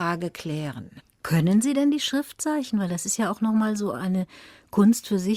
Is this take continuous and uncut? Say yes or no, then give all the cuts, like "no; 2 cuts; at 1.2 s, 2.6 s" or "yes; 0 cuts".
yes; 0 cuts